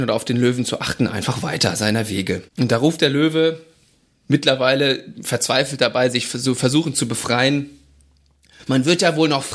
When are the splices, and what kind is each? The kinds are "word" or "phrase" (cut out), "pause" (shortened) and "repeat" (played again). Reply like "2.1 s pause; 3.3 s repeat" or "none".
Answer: 2.5 s pause